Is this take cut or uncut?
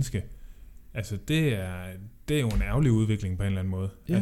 uncut